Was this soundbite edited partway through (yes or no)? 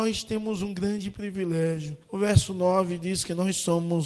yes